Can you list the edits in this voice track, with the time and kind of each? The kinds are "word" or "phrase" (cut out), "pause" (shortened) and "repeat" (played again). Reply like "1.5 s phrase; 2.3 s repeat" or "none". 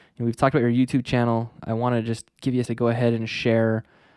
1.6 s word; 2.6 s word